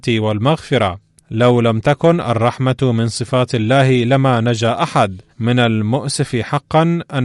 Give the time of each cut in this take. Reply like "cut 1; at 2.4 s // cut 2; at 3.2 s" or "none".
cut 1; at 1.2 s // cut 2; at 5.3 s